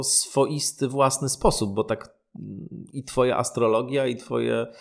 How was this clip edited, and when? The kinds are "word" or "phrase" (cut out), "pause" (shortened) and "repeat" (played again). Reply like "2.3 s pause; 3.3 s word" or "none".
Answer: none